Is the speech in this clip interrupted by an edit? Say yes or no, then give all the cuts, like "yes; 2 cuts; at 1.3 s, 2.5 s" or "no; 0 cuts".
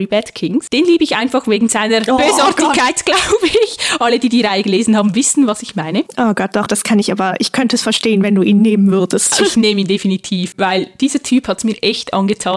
yes; 1 cut; at 6.7 s